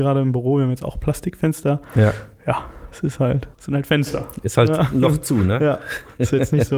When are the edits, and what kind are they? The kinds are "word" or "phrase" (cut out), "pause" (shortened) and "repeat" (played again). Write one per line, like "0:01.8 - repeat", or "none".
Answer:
0:03.5 - pause